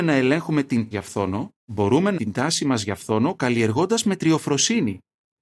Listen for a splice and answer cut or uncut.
cut